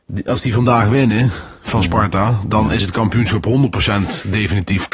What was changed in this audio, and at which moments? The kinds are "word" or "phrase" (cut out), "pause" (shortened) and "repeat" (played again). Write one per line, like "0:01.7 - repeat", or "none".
none